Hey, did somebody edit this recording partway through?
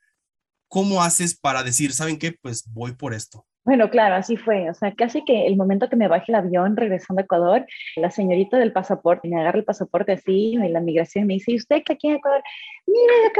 yes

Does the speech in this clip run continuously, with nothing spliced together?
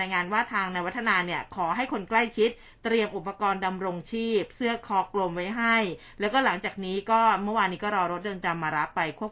yes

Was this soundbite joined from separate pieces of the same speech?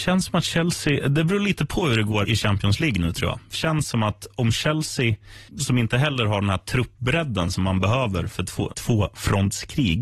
yes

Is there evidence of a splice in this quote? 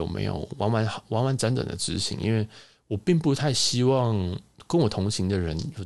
no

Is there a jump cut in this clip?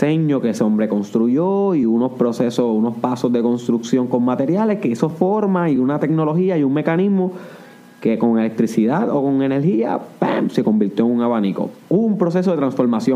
no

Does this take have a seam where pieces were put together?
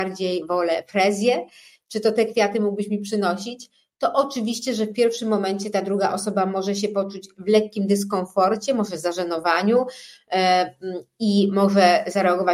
no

